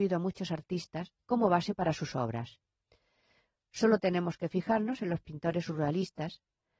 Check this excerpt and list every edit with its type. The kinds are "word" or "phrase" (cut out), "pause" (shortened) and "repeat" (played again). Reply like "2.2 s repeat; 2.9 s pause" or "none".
none

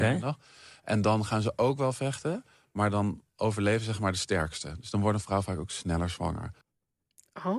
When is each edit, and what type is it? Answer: none

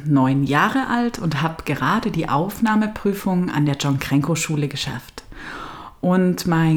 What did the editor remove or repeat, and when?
none

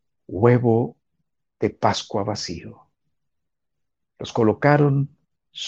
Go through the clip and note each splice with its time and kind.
none

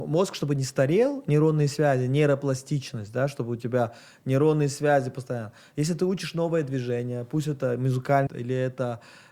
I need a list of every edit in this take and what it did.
8.3 s word

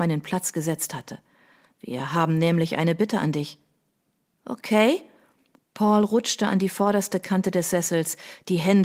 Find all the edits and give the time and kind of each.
none

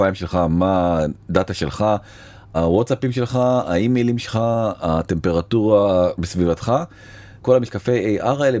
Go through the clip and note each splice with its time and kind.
none

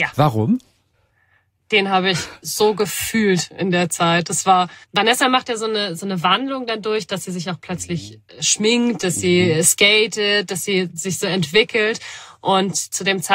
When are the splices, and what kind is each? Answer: 4.8 s pause

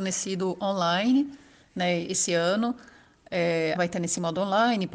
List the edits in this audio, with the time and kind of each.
3.7 s word

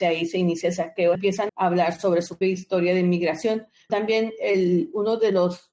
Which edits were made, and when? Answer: 1.1 s word; 1.5 s word; 2.4 s word; 3.9 s word

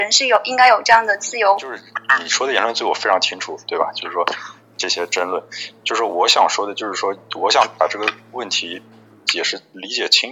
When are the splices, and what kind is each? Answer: none

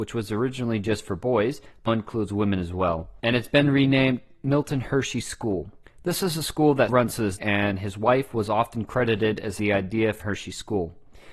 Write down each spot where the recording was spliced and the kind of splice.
1.9 s word; 3.2 s pause; 5.8 s pause; 6.9 s word; 7.4 s word; 9.6 s word; 10.2 s word

